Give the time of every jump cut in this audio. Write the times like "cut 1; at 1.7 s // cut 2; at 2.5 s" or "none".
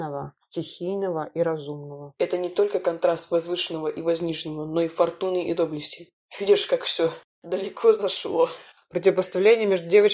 none

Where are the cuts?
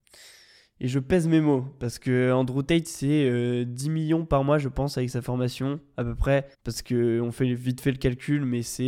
cut 1; at 6.5 s

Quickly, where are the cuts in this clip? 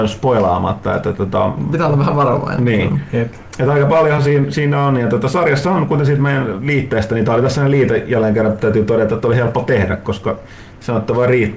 none

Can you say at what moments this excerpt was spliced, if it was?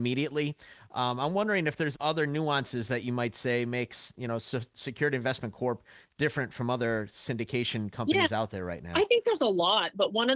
cut 1; at 1.9 s

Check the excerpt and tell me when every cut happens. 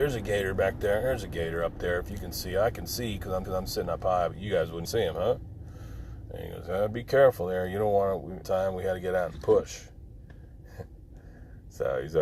cut 1; at 3.4 s // cut 2; at 4.8 s // cut 3; at 8.4 s

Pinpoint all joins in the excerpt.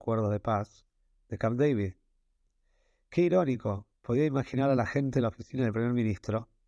none

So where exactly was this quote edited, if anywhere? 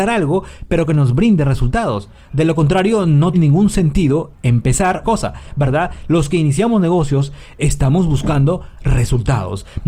cut 1; at 3.3 s // cut 2; at 5.0 s

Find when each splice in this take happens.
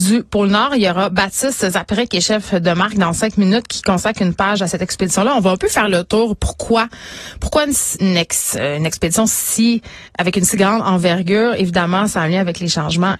cut 1; at 8.0 s // cut 2; at 10.1 s

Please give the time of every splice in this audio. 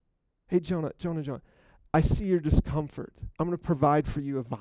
cut 1; at 3.3 s

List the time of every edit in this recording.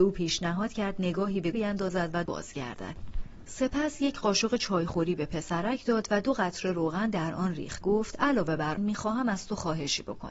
cut 1; at 1.5 s // cut 2; at 2.3 s // cut 3; at 7.8 s // cut 4; at 8.8 s

